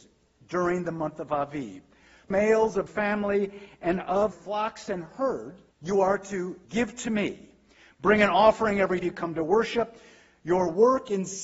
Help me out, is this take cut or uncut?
cut